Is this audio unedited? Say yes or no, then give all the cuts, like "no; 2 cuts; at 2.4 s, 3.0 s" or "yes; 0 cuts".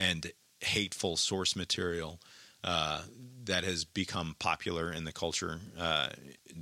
yes; 0 cuts